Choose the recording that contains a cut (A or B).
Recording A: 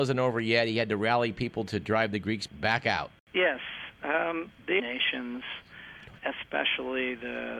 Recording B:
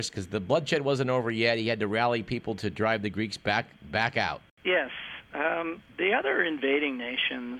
A